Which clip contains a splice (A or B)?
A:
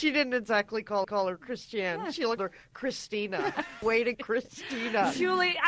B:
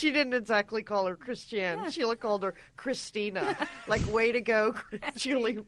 A